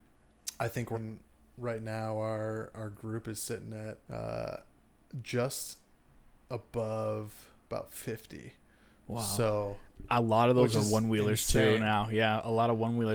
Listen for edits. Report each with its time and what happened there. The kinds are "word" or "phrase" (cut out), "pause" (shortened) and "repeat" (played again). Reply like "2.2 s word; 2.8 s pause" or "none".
0.9 s phrase; 4.0 s pause; 7.6 s pause